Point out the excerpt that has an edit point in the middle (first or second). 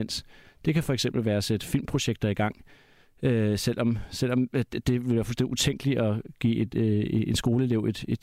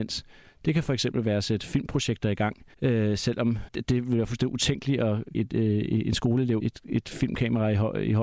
second